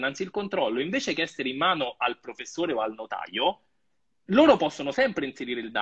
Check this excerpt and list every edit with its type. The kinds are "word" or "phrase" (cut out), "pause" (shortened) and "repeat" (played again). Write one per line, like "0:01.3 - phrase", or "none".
none